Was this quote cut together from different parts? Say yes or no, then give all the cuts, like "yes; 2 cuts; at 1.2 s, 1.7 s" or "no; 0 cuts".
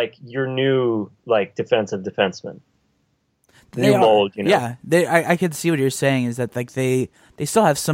no; 0 cuts